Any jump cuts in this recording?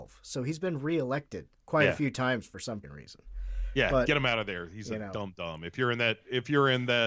yes; 2 cuts; at 1.5 s, 2.8 s

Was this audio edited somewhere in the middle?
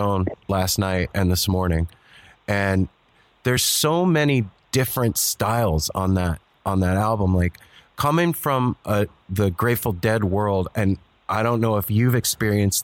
no; 0 cuts

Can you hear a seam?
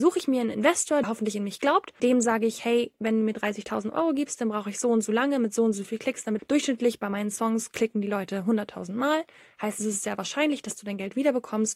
yes; 3 cuts; at 1.0 s, 2.0 s, 6.4 s

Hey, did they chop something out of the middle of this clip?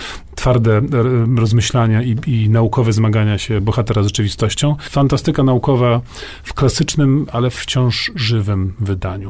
no; 0 cuts

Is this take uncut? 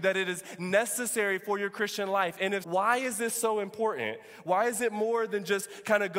no; 1 cut; at 2.6 s

